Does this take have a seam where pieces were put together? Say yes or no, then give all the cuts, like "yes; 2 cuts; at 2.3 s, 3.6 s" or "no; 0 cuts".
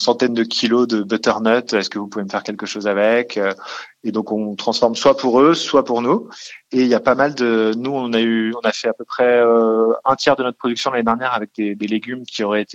no; 0 cuts